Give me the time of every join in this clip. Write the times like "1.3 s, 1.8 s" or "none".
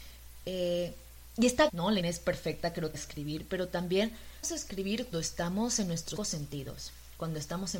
1.7 s, 2.0 s, 2.9 s, 4.4 s, 5.1 s, 6.2 s